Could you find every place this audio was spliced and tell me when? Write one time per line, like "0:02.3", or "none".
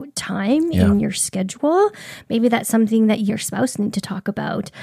0:03.3

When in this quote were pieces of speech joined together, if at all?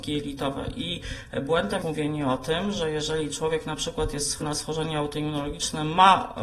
0:01.8
0:04.4

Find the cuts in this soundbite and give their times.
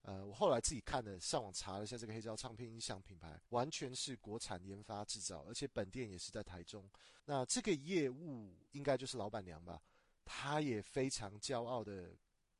0:03.5
0:07.2

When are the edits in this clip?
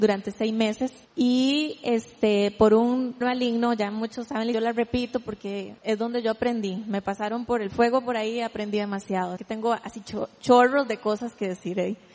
0:01.0
0:03.2
0:04.5
0:05.8
0:09.4

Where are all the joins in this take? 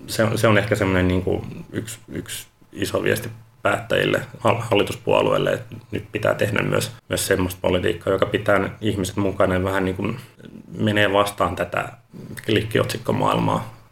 none

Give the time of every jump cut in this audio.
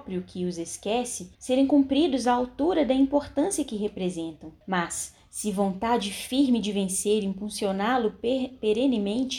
0:01.3
0:04.6

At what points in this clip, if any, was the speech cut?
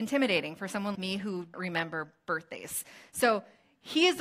0:00.9
0:01.5

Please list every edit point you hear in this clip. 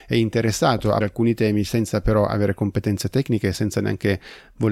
0:01.0

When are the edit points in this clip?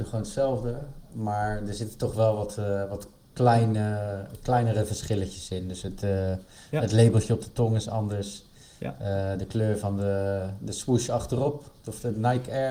none

